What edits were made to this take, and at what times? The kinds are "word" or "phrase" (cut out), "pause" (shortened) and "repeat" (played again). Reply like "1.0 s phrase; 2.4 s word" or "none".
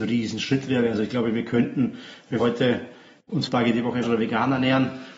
2.4 s word; 3.5 s word; 4.0 s word